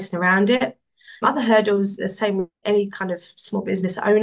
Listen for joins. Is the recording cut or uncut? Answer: cut